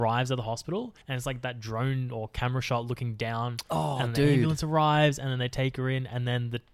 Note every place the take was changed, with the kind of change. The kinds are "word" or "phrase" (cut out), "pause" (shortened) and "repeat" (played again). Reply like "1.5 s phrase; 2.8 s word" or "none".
1.0 s pause